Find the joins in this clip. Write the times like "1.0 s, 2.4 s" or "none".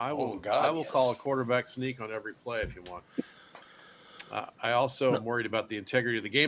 none